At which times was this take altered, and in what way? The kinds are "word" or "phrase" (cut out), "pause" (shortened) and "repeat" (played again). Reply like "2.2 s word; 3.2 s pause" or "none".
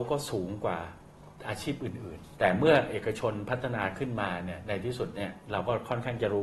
1.4 s pause; 2.4 s pause